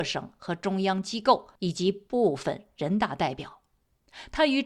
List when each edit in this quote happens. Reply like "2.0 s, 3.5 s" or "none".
1.6 s